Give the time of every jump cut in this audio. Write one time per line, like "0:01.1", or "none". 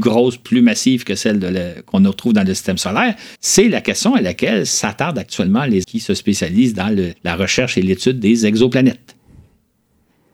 0:03.3
0:05.8
0:07.2